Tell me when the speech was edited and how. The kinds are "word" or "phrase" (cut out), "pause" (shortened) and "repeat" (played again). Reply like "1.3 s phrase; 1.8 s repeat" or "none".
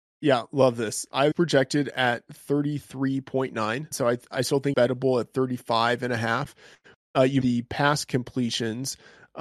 1.3 s word; 3.9 s word; 4.7 s word; 7.4 s word

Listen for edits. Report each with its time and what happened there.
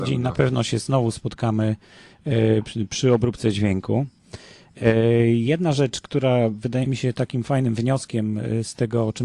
none

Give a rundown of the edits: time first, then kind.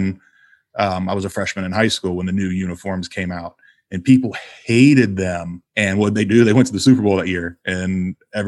5.7 s pause

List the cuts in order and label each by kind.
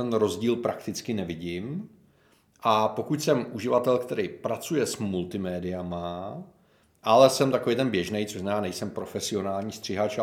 none

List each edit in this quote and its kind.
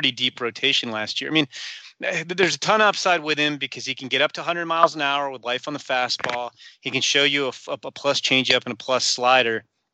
none

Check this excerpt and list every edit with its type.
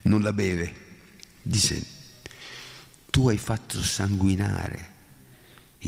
none

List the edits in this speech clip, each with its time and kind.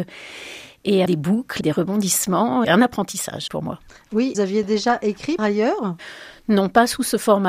1.1 s word; 1.6 s word; 2.6 s word; 3.5 s word; 4.3 s word; 5.4 s word

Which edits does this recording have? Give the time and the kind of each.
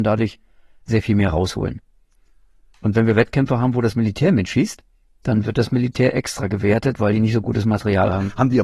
none

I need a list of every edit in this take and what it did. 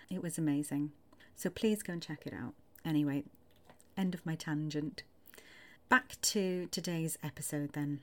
5.8 s pause

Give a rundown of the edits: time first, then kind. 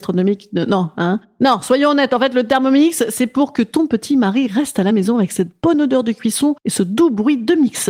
none

